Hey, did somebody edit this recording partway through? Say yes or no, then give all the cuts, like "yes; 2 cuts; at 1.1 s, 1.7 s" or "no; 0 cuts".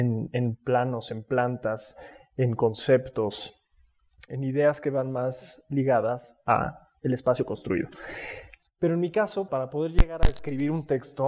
yes; 2 cuts; at 4.3 s, 9.5 s